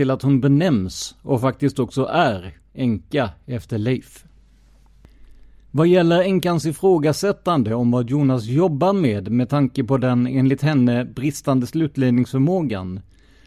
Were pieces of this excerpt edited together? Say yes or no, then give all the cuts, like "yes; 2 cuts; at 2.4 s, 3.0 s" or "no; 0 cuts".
no; 0 cuts